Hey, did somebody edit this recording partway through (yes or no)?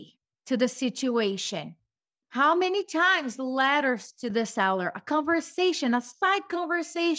no